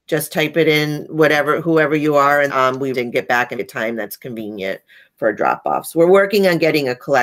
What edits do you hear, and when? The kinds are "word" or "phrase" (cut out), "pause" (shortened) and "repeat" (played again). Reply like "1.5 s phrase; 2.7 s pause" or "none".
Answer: 2.5 s word; 2.9 s word; 3.5 s word